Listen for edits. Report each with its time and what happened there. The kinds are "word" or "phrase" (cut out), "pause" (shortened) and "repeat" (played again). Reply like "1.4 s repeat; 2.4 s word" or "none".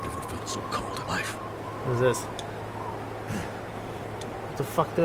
1.1 s word